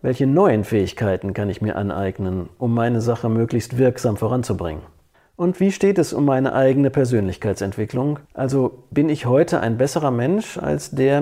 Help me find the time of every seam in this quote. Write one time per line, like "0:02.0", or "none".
0:05.1
0:08.2